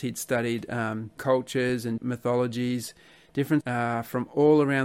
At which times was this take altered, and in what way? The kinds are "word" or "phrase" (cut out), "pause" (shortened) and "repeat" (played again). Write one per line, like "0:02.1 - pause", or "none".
0:01.2 - word
0:02.0 - word
0:03.6 - word